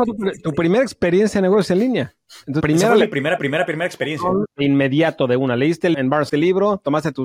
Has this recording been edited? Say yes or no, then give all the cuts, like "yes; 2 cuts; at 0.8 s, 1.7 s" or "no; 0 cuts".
yes; 4 cuts; at 2.6 s, 3.4 s, 5.9 s, 6.3 s